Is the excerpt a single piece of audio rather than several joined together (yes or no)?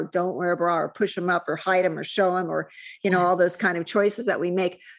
yes